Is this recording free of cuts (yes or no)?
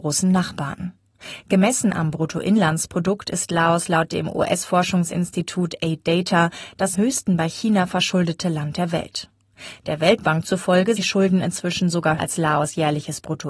no